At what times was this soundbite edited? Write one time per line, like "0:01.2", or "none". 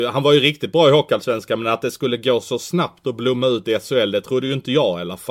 none